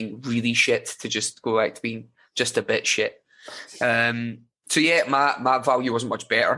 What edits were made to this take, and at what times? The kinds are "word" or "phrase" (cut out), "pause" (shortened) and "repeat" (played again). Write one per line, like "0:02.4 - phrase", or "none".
none